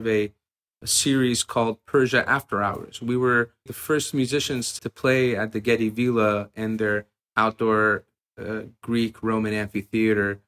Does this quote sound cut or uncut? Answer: cut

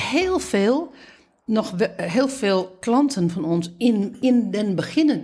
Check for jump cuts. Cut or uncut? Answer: uncut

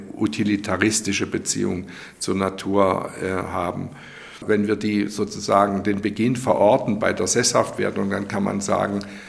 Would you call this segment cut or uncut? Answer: uncut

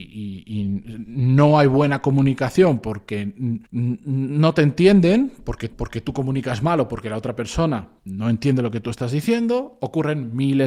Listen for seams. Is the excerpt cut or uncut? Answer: cut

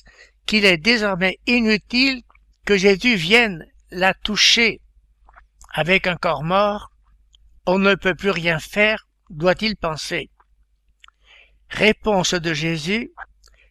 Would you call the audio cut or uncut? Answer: uncut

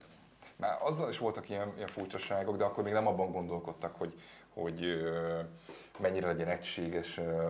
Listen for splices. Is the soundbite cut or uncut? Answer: uncut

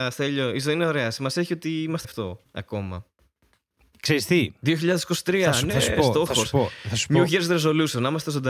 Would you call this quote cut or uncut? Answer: cut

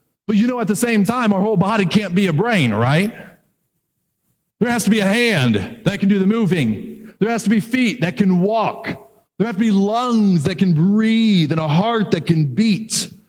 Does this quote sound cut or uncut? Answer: uncut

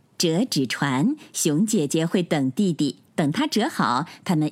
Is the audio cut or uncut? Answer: cut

